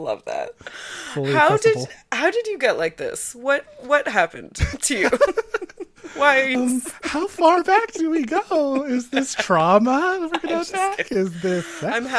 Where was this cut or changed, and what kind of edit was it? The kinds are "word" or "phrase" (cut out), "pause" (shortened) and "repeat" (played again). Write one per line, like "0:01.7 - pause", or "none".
0:06.6 - word